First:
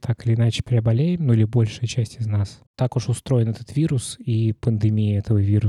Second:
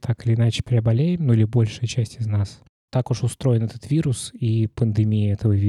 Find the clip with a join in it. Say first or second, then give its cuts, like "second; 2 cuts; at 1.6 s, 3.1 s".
first; 1 cut; at 2.7 s